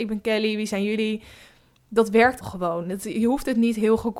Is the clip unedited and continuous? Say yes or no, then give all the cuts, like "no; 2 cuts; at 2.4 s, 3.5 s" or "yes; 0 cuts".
no; 1 cut; at 2.4 s